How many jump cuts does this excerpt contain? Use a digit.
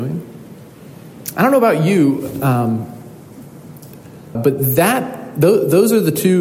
1